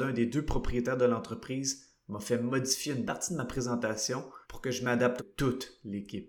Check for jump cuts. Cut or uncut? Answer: cut